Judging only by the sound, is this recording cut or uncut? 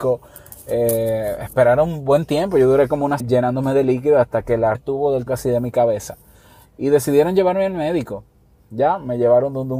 cut